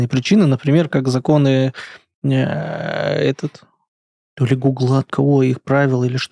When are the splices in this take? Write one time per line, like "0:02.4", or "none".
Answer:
0:05.1